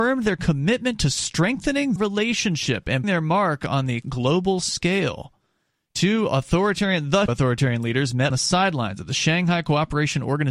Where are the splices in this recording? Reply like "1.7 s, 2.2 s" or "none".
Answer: 2.0 s, 3.0 s, 4.0 s, 7.3 s, 8.3 s